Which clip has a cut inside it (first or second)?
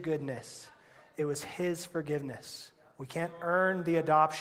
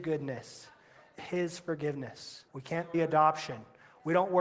second